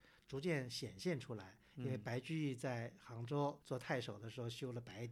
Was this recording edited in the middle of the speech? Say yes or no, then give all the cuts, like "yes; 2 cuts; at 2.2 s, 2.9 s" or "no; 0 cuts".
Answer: yes; 1 cut; at 3.6 s